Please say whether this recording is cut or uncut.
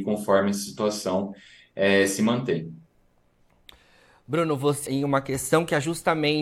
cut